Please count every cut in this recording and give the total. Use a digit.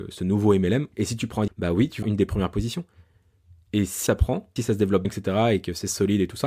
6